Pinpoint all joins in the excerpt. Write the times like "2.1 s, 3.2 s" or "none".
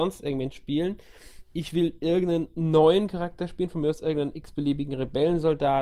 none